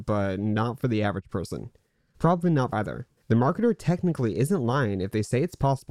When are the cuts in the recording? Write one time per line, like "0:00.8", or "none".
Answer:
0:02.7
0:03.2